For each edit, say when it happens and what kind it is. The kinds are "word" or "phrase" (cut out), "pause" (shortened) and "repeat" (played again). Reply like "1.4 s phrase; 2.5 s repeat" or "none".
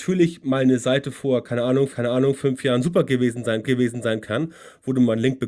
1.9 s repeat; 3.6 s repeat